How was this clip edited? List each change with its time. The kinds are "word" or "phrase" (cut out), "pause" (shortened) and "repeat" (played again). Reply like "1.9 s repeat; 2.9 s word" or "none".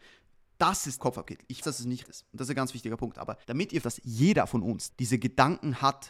1.0 s phrase; 1.6 s word; 2.0 s word; 3.4 s pause; 3.8 s word; 4.9 s word